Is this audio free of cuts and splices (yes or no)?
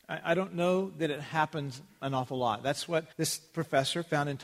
no